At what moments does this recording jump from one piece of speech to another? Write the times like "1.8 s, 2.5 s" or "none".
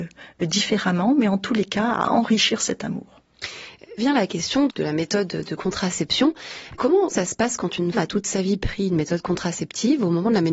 4.0 s, 7.1 s, 7.9 s